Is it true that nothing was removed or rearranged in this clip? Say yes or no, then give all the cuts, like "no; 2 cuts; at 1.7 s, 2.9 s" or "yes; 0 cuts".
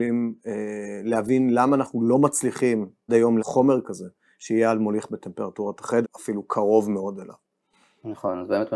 no; 3 cuts; at 3.1 s, 3.4 s, 6.0 s